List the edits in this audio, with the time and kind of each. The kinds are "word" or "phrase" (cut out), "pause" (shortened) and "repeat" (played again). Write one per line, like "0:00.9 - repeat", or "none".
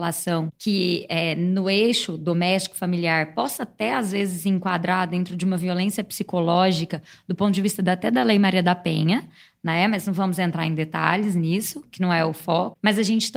none